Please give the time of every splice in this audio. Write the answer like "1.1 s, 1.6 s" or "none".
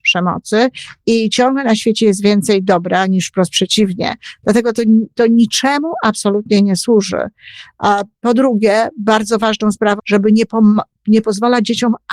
10.0 s